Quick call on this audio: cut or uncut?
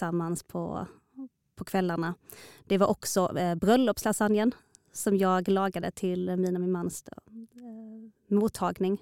uncut